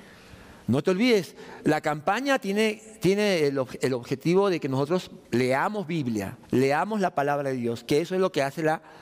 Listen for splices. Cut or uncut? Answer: cut